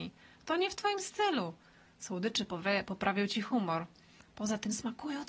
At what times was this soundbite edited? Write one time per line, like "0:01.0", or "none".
none